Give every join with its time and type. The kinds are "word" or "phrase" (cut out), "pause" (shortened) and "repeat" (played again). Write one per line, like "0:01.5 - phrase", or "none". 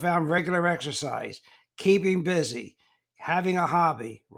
none